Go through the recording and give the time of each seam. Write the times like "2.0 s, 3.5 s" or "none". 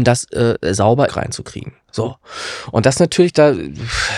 1.1 s